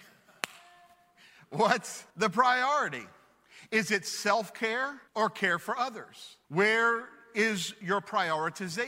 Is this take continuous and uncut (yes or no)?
no